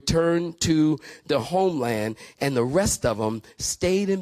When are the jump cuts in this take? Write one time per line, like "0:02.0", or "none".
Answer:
none